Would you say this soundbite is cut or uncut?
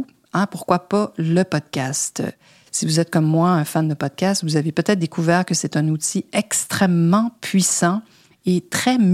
uncut